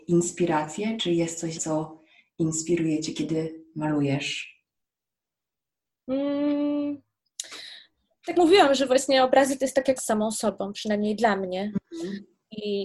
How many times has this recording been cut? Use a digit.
4